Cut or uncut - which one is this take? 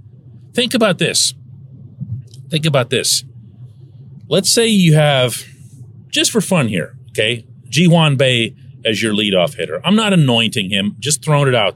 uncut